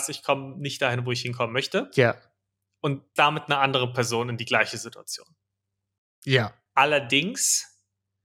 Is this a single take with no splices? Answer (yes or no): no